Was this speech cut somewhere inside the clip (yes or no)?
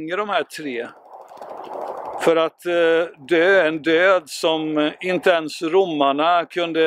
no